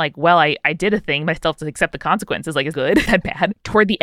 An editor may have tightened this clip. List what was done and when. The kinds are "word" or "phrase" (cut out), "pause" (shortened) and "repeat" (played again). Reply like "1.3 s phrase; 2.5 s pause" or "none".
2.7 s word; 3.1 s word